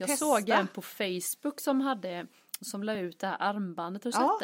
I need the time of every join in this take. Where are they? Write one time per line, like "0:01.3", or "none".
none